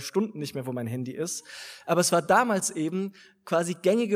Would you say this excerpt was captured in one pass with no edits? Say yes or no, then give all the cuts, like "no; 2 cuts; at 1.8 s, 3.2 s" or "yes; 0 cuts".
yes; 0 cuts